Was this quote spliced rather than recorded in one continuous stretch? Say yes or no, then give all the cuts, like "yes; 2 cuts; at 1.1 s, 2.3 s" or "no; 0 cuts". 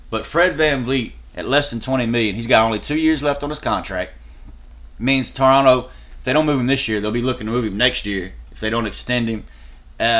no; 0 cuts